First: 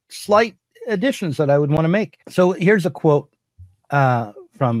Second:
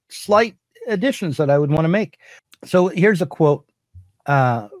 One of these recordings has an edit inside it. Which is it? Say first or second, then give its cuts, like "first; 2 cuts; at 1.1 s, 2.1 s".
first; 1 cut; at 2.2 s